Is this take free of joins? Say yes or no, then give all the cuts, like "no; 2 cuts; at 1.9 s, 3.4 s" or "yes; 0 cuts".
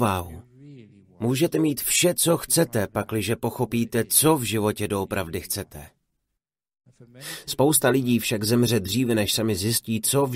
yes; 0 cuts